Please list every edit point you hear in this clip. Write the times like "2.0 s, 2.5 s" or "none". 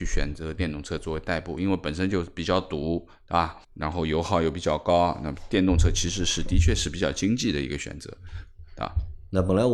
3.6 s